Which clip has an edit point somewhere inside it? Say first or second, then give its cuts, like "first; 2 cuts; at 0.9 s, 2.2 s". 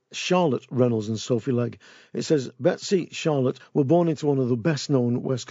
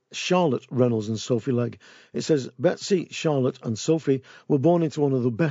first; 1 cut; at 3.6 s